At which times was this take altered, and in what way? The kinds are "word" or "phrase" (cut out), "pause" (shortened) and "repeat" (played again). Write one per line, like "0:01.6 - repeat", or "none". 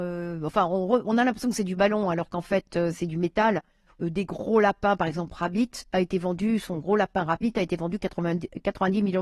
none